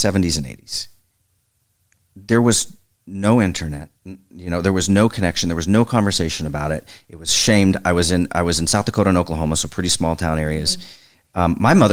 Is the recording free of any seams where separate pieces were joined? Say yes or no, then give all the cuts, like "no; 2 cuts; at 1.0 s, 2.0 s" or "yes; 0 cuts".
no; 1 cut; at 4.0 s